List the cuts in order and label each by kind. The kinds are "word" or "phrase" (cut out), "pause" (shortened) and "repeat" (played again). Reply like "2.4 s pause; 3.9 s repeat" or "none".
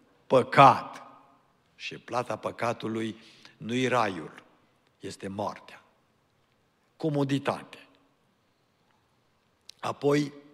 none